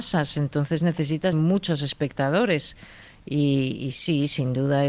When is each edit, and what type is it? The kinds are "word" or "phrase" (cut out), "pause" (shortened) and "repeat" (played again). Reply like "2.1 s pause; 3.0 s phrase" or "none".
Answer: 1.3 s phrase